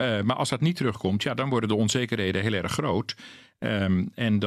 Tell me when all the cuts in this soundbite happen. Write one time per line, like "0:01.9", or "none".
none